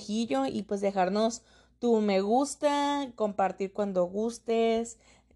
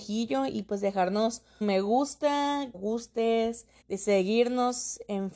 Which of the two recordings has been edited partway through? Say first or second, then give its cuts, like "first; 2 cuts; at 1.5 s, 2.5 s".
second; 3 cuts; at 1.6 s, 2.7 s, 3.8 s